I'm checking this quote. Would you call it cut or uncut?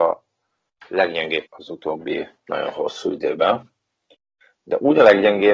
cut